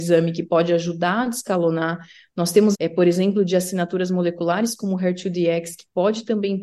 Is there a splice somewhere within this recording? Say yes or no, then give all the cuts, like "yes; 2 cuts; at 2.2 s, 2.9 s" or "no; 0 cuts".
yes; 1 cut; at 2.7 s